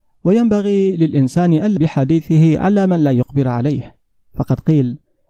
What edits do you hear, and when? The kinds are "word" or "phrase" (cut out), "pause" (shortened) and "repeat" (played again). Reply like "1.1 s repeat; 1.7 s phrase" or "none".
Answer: 1.8 s word